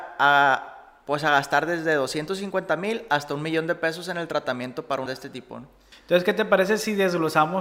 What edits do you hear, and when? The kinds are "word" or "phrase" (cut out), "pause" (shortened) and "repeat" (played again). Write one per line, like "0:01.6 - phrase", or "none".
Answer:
0:05.1 - word

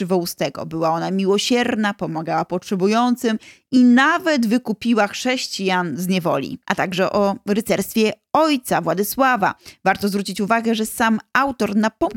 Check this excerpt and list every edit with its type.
none

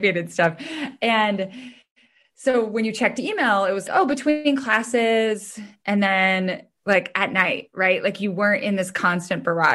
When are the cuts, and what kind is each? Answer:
0:03.9 - word

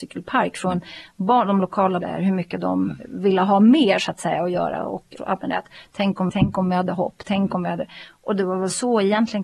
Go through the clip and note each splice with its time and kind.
0:02.0 - phrase
0:05.2 - word
0:06.3 - phrase

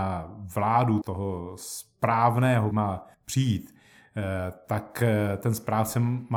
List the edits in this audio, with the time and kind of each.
0:01.0 - word
0:02.7 - word
0:03.1 - pause

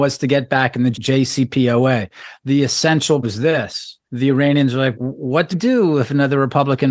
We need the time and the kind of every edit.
0:00.9 - word
0:03.2 - word
0:04.0 - pause
0:04.9 - word
0:05.5 - word

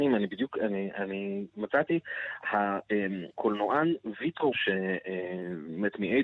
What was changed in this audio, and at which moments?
0:03.3 - pause
0:04.5 - word

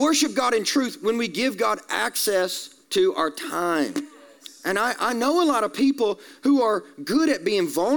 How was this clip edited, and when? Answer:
0:02.8 - pause

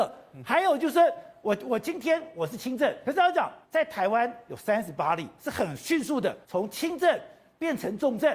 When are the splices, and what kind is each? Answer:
0:03.0 - word
0:03.6 - pause
0:06.4 - pause

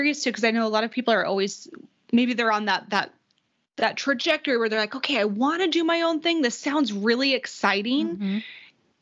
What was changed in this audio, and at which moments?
none

